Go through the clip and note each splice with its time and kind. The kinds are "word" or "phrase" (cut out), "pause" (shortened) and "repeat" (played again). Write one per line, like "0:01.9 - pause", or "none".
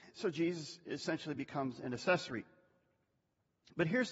none

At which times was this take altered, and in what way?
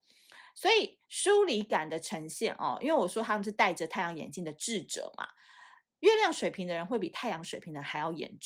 0:01.0 - pause

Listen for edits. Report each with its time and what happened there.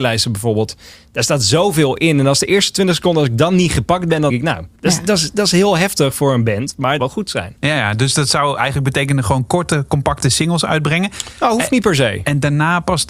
0:04.3 - word
0:04.8 - pause
0:07.0 - phrase

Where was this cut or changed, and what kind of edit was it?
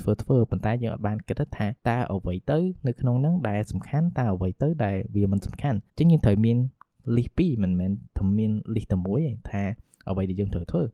0:01.8 - pause
0:05.9 - pause

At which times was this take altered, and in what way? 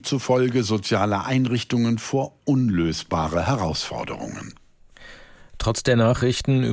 none

